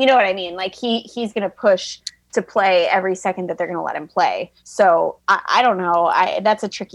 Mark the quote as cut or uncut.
cut